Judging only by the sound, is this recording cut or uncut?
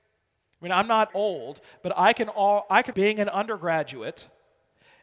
cut